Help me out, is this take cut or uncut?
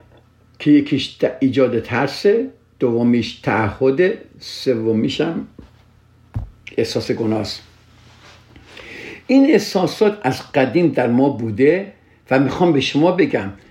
uncut